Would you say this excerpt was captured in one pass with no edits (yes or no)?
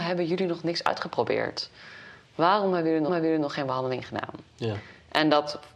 no